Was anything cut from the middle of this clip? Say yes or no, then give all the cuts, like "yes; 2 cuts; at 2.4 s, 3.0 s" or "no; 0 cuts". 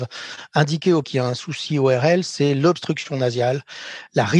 yes; 1 cut; at 1.0 s